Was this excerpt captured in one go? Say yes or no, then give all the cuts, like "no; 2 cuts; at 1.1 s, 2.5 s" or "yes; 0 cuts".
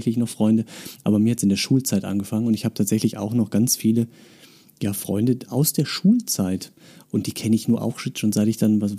yes; 0 cuts